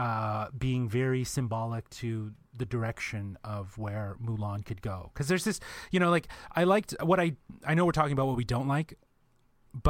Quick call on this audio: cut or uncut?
uncut